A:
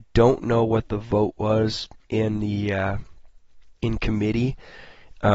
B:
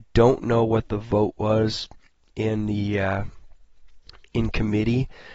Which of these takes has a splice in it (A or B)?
A